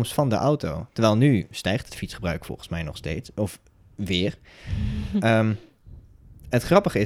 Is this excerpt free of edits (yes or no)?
yes